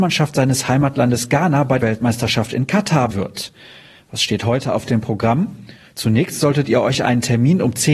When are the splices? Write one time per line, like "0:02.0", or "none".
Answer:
0:01.8
0:03.1